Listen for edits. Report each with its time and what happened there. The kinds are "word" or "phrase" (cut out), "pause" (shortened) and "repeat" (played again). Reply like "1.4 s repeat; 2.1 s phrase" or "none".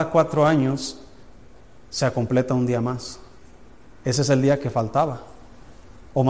none